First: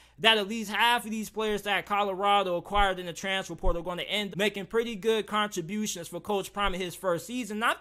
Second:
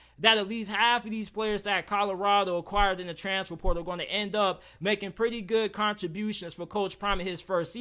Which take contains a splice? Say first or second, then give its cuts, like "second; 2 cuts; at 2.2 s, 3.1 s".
first; 1 cut; at 4.3 s